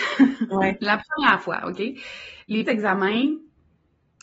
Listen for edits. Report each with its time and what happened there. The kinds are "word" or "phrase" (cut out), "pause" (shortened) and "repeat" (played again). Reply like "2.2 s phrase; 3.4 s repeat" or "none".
2.6 s word